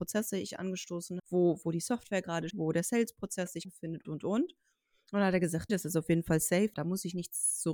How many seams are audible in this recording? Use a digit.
7